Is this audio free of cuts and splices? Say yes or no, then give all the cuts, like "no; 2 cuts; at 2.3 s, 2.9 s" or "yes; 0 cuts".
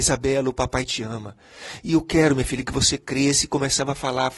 yes; 0 cuts